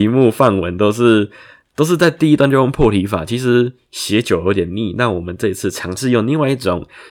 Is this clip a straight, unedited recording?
yes; 0 cuts

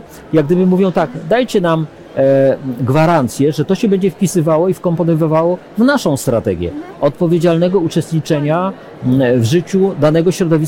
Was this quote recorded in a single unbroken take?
yes; 0 cuts

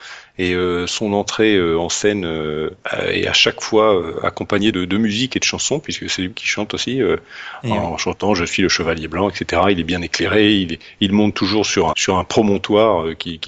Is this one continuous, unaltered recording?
no; 2 cuts; at 4.7 s, 11.9 s

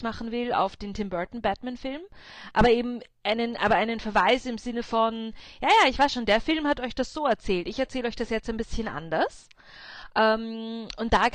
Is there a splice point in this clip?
no; 0 cuts

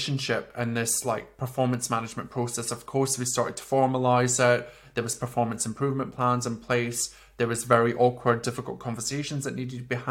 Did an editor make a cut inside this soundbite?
no; 0 cuts

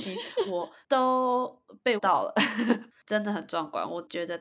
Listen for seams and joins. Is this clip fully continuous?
no; 1 cut; at 2.0 s

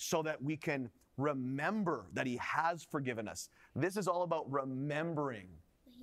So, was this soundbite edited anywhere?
no; 0 cuts

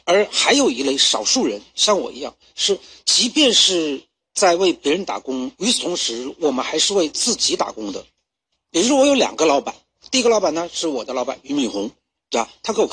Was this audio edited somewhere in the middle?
no; 0 cuts

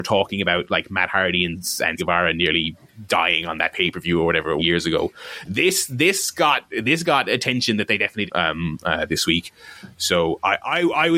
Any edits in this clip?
yes; 3 cuts; at 2.0 s, 4.6 s, 8.3 s

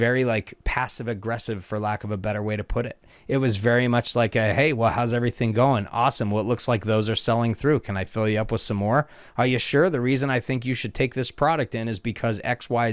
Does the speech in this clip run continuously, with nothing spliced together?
yes; 0 cuts

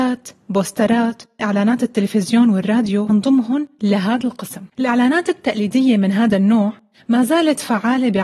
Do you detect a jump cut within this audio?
yes; 3 cuts; at 1.4 s, 3.1 s, 4.7 s

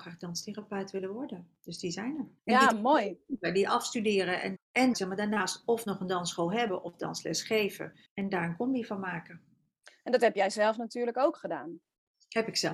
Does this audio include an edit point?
yes; 4 cuts; at 2.4 s, 4.6 s, 4.9 s, 8.1 s

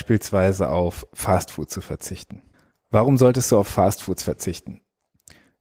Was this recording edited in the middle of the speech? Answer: no; 0 cuts

